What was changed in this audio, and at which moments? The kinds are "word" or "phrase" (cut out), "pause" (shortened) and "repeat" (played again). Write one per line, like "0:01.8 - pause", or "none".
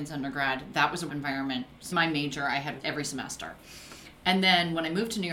0:01.1 - word
0:01.9 - phrase
0:02.8 - word